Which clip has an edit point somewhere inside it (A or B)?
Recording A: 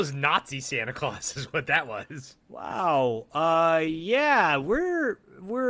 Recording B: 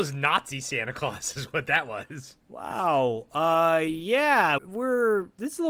B